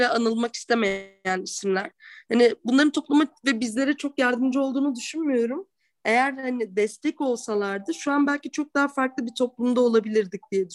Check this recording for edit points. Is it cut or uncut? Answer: uncut